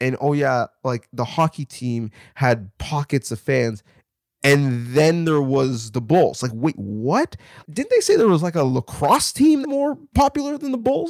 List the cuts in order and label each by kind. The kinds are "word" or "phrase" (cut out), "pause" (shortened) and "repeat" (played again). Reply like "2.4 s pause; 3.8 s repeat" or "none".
9.6 s phrase